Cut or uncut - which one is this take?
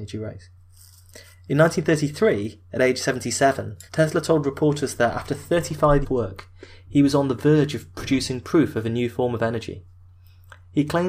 cut